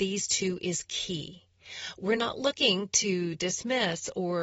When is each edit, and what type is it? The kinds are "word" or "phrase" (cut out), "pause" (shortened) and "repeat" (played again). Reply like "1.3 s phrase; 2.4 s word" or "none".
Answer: none